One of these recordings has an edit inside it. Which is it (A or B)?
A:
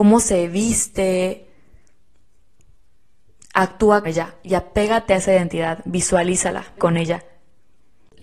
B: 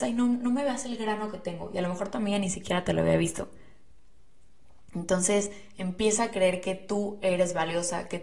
A